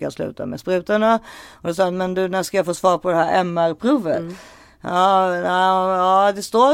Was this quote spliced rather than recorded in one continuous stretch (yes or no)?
no